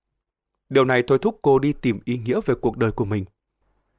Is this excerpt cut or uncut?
uncut